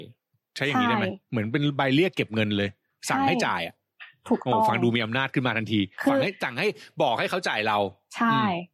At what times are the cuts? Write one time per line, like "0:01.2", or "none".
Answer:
none